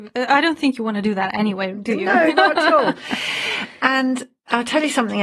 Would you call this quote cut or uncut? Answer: cut